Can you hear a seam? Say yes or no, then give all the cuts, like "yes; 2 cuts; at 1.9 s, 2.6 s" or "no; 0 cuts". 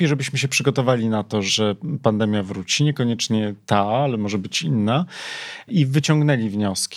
no; 0 cuts